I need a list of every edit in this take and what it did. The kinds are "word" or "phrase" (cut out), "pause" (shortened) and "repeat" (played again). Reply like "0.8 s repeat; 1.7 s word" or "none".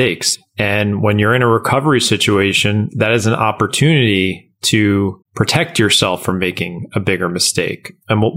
5.2 s pause